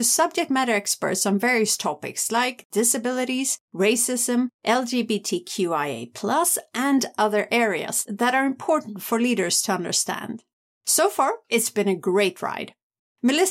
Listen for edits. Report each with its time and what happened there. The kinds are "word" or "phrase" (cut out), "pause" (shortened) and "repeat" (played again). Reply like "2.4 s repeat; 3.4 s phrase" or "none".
none

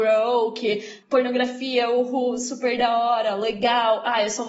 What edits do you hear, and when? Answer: 1.0 s word

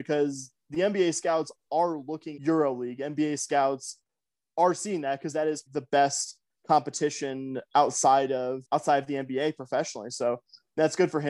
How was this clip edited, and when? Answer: 2.4 s word; 5.7 s word; 8.6 s word

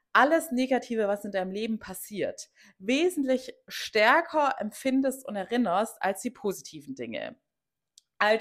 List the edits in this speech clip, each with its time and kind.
none

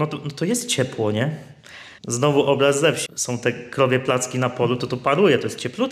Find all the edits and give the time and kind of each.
2.0 s pause; 3.1 s word

